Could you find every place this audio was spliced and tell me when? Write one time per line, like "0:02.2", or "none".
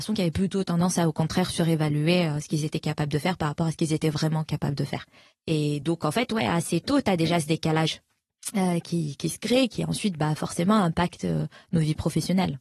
none